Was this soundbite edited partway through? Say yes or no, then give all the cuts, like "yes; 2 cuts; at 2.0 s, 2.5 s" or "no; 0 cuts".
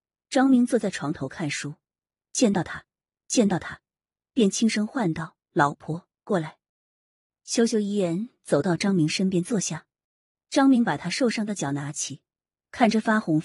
yes; 1 cut; at 3.1 s